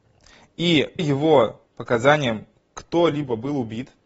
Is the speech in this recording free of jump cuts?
no; 2 cuts; at 1.0 s, 1.7 s

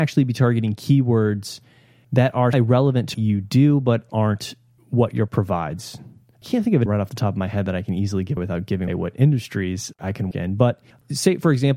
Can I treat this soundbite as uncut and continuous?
no; 8 cuts; at 2.5 s, 3.1 s, 4.1 s, 5.3 s, 6.9 s, 8.4 s, 8.9 s, 10.3 s

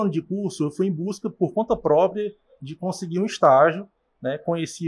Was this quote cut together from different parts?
no; 0 cuts

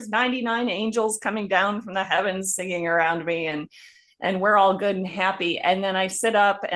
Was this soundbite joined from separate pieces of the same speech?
no; 0 cuts

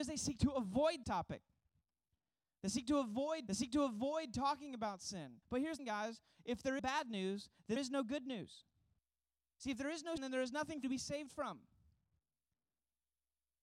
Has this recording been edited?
yes; 9 cuts; at 1.0 s, 3.5 s, 5.4 s, 5.8 s, 6.8 s, 7.8 s, 9.0 s, 10.2 s, 10.8 s

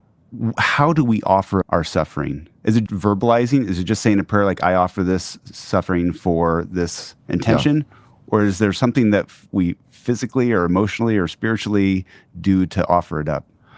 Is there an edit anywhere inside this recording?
yes; 2 cuts; at 1.6 s, 2.9 s

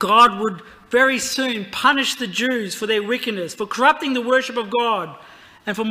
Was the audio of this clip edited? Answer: no; 0 cuts

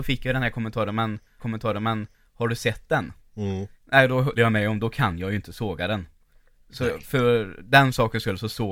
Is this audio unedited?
no; 3 cuts; at 1.4 s, 3.8 s, 4.4 s

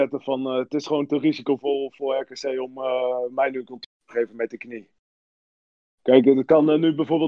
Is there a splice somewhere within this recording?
no; 0 cuts

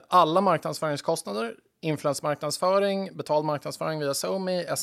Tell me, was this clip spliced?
no; 0 cuts

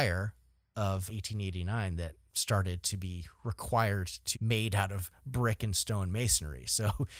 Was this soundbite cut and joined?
yes; 3 cuts; at 1.1 s, 2.3 s, 4.3 s

